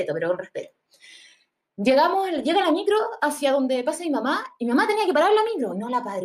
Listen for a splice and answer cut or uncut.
uncut